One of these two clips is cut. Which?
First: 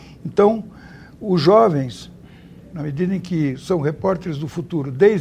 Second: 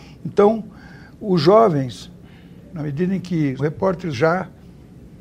second; 2 cuts; at 3.6 s, 4.1 s

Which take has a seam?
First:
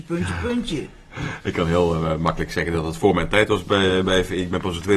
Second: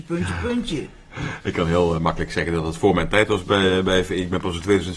second; 1 cut; at 2.0 s

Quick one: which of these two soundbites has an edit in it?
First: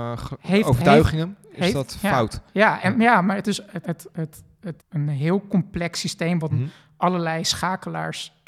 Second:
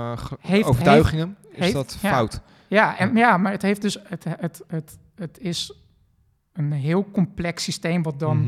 first; 5 cuts; at 2.5 s, 3.4 s, 3.8 s, 4.8 s, 6.5 s

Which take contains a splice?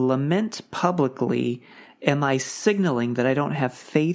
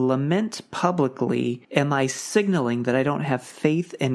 second; 1 cut; at 1.6 s

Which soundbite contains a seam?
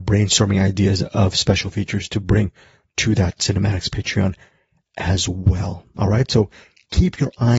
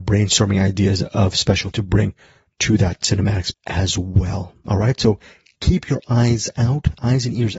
second; 2 cuts; at 1.7 s, 3.5 s

